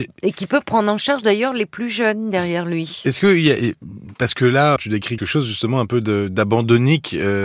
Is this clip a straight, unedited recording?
no; 2 cuts; at 4.8 s, 5.2 s

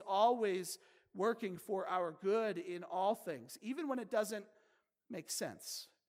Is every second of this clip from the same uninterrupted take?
yes; 0 cuts

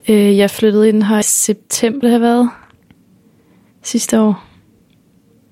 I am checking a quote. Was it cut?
yes; 2 cuts; at 1.2 s, 2.0 s

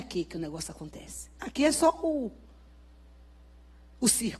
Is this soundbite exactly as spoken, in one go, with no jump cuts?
no; 1 cut; at 1.4 s

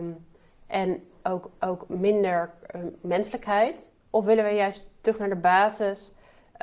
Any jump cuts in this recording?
yes; 2 cuts; at 1.5 s, 4.0 s

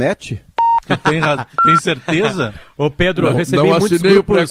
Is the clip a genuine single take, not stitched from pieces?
yes; 0 cuts

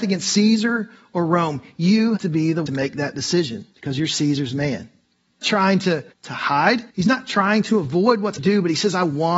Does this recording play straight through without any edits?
no; 7 cuts; at 2.2 s, 2.7 s, 3.7 s, 5.4 s, 6.1 s, 6.9 s, 8.4 s

